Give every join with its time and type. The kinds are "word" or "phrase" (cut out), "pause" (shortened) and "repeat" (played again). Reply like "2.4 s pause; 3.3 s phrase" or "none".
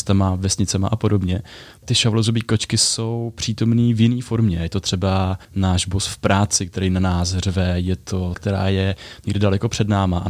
1.8 s word; 5.4 s pause; 8.3 s word